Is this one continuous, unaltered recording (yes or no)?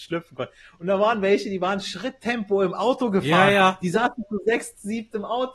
yes